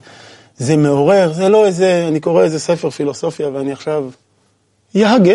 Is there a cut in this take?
no; 0 cuts

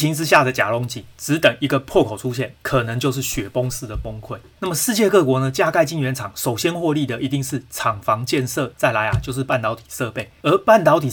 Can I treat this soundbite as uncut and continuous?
no; 1 cut; at 8.7 s

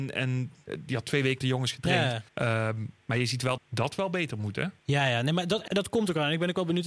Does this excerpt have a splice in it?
yes; 5 cuts; at 1.4 s, 2.3 s, 3.6 s, 4.8 s, 5.7 s

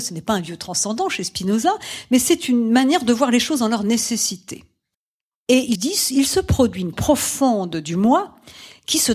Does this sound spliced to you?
yes; 3 cuts; at 4.9 s, 5.7 s, 6.9 s

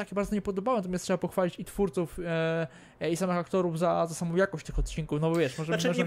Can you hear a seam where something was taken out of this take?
no; 0 cuts

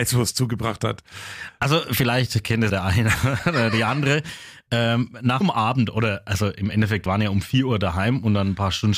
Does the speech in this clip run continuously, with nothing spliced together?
no; 3 cuts; at 2.7 s, 5.4 s, 7.1 s

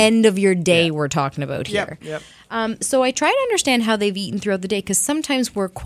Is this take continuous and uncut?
yes; 0 cuts

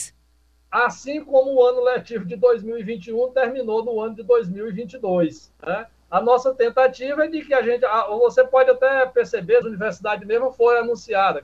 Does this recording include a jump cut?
yes; 2 cuts; at 5.5 s, 9.6 s

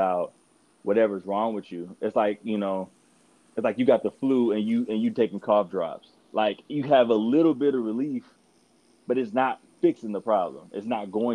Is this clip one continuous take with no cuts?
yes; 0 cuts

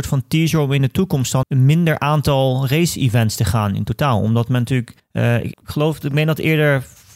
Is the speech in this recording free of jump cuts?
no; 3 cuts; at 1.4 s, 5.0 s, 5.5 s

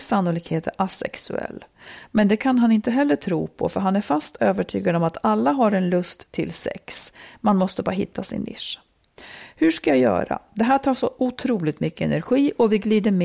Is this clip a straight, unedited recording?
yes; 0 cuts

